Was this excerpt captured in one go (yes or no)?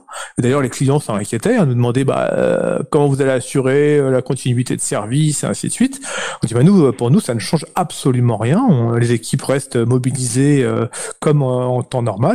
yes